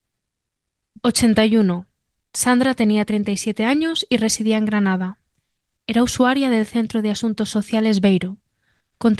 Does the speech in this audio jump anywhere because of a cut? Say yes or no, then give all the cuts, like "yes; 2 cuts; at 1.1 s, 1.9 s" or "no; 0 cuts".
no; 0 cuts